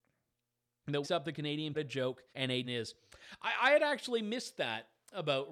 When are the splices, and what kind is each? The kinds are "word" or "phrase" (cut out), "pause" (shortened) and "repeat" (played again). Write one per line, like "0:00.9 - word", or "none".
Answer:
0:01.0 - word
0:01.7 - phrase
0:02.3 - pause
0:02.6 - phrase